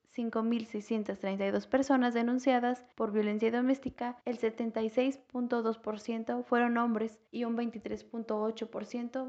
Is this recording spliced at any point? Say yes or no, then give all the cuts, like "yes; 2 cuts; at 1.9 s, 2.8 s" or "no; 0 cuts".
yes; 3 cuts; at 2.9 s, 4.2 s, 7.3 s